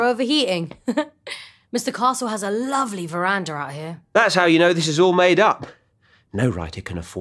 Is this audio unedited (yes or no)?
yes